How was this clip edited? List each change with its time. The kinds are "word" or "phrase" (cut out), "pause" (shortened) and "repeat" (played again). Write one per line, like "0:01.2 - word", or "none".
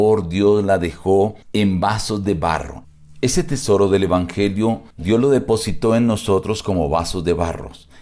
0:01.4 - pause
0:04.9 - pause